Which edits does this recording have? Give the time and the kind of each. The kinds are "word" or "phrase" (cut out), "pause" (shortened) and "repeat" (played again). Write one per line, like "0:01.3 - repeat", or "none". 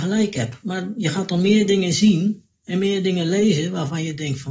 none